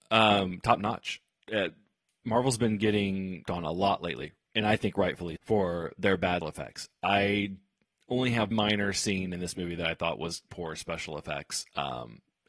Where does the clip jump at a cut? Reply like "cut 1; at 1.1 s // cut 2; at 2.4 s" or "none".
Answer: cut 1; at 3.5 s // cut 2; at 5.4 s // cut 3; at 6.4 s // cut 4; at 8.5 s // cut 5; at 10.5 s

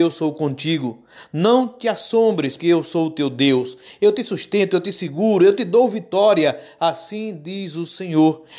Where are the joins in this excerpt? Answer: cut 1; at 2.6 s

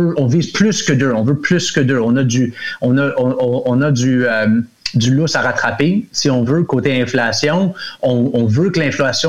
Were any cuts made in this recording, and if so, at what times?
none

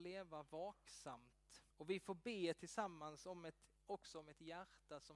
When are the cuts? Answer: cut 1; at 1.7 s // cut 2; at 3.8 s

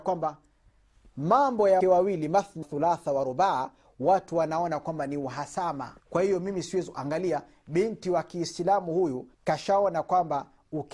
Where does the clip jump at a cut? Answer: cut 1; at 1.8 s // cut 2; at 2.6 s // cut 3; at 6.0 s // cut 4; at 9.3 s

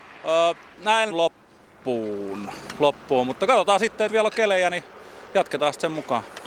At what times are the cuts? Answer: cut 1; at 1.1 s // cut 2; at 4.1 s

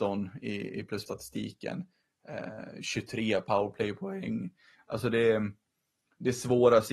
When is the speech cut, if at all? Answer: cut 1; at 1.1 s

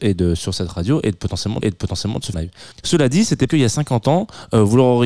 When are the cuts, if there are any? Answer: cut 1; at 1.6 s // cut 2; at 2.3 s // cut 3; at 2.7 s // cut 4; at 3.5 s

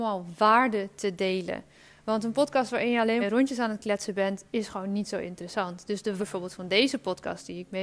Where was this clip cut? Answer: cut 1; at 3.2 s // cut 2; at 6.2 s

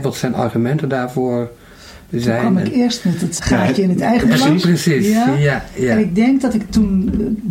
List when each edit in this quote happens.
cut 1; at 3.4 s

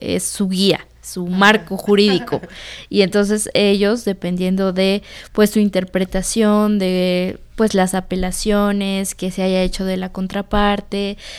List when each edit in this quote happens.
none

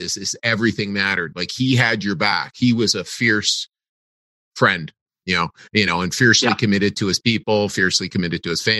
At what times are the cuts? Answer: none

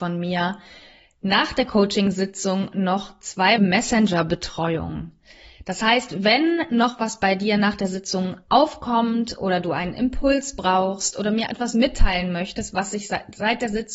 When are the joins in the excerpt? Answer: cut 1; at 3.6 s // cut 2; at 11.5 s

